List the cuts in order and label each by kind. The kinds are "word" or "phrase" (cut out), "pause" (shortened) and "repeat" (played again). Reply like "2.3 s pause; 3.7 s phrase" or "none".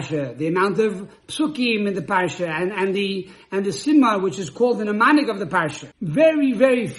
5.9 s pause